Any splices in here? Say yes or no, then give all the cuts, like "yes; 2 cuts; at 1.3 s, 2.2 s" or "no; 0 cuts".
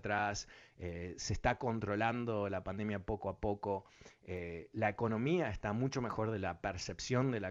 no; 0 cuts